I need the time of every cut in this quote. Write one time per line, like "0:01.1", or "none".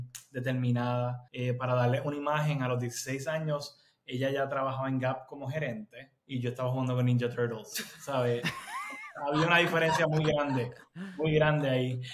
0:01.3
0:06.2

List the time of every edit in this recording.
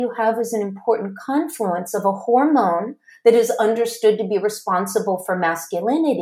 none

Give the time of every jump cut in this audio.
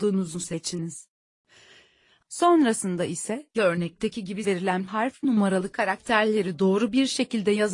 0:03.5
0:04.4
0:05.2

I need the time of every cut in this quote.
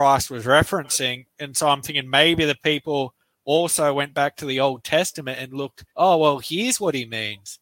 0:05.9

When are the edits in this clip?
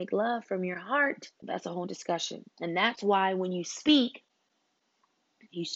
0:01.3
0:01.8
0:02.5

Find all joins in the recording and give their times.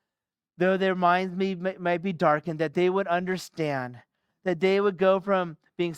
none

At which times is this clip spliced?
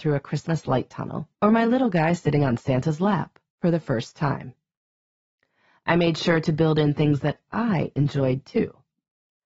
0:01.3
0:03.5

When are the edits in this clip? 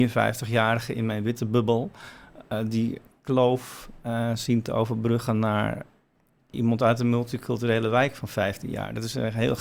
none

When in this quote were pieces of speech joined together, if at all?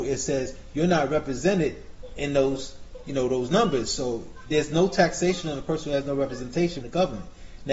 0:06.8

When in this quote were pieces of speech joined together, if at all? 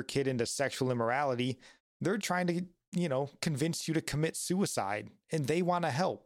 0:02.2

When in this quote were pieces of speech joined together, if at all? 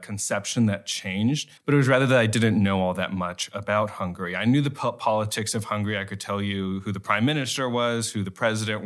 0:01.6

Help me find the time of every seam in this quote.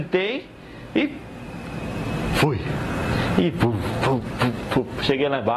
none

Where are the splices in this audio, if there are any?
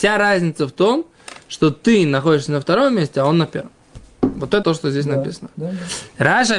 0:04.6

